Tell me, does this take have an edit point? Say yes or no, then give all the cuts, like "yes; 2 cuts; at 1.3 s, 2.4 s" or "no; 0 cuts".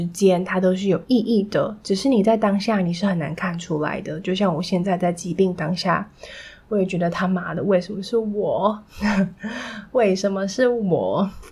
no; 0 cuts